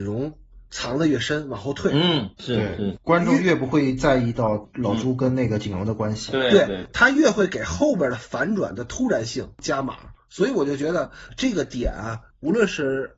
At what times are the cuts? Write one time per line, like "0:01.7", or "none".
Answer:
none